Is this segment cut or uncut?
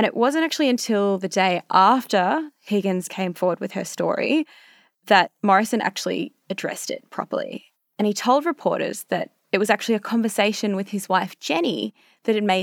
uncut